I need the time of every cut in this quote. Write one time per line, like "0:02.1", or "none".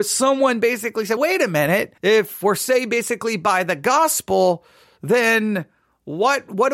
0:01.2
0:02.0